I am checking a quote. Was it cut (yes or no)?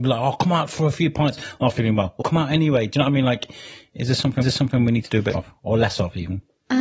yes